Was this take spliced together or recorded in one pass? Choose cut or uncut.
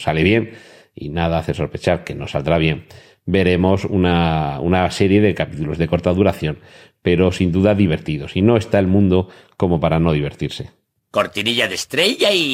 uncut